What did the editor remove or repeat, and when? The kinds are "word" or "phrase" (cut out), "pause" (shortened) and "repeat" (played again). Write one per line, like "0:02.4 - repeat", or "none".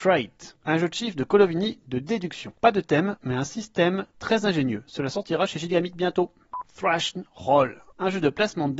0:02.6 - pause